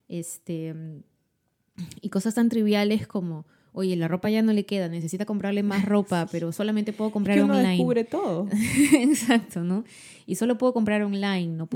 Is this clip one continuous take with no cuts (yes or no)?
yes